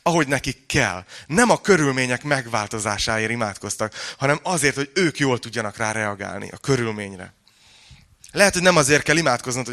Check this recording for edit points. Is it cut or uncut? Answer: uncut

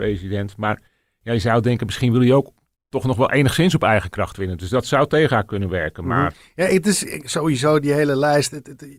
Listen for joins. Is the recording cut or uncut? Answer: uncut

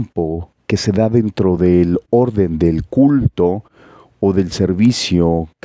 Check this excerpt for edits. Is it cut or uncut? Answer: uncut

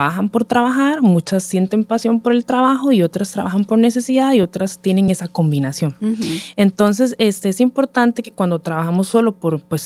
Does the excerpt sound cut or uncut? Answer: uncut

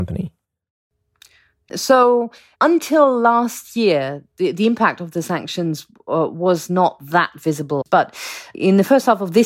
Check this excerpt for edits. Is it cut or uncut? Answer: uncut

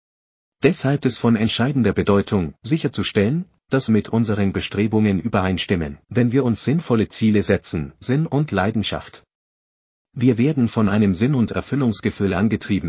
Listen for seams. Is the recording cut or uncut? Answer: cut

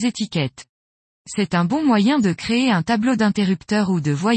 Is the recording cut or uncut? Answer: uncut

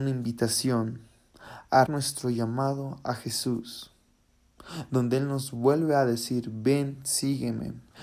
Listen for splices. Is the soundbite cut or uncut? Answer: cut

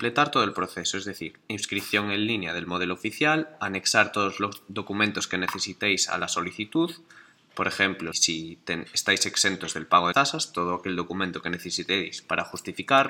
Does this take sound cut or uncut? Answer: cut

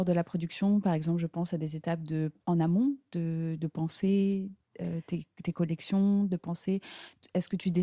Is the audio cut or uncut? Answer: cut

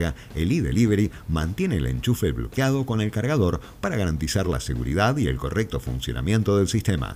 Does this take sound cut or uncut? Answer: uncut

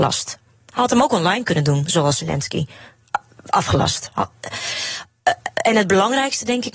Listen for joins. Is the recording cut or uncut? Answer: uncut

